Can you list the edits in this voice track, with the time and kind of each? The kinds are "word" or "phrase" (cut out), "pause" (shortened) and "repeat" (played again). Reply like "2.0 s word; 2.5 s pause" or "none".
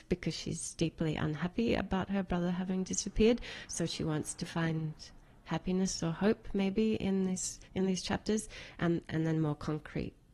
7.7 s pause